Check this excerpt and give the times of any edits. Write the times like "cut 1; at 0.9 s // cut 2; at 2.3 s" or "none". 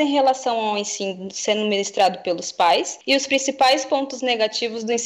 none